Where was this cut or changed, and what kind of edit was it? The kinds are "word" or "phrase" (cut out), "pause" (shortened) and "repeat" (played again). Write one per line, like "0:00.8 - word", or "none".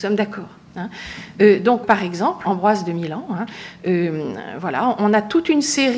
0:01.8 - word
0:02.4 - word
0:05.0 - word